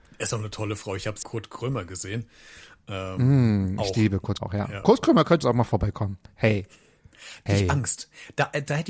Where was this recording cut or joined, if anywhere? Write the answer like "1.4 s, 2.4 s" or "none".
1.2 s, 4.4 s, 5.4 s, 7.5 s